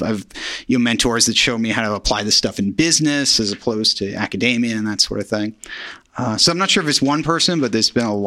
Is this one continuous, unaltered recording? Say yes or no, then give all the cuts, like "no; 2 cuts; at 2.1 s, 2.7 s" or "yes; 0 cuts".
yes; 0 cuts